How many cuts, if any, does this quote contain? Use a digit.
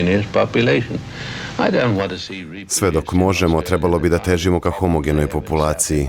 0